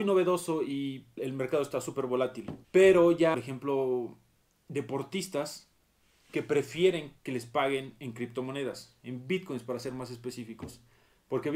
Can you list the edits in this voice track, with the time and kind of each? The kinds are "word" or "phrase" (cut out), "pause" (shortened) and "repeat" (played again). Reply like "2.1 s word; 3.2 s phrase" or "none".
1.2 s word; 2.6 s pause; 3.3 s phrase; 7.2 s pause